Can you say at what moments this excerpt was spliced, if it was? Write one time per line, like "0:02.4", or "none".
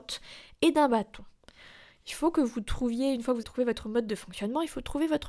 0:03.4